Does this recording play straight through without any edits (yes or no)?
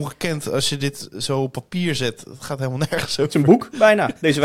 yes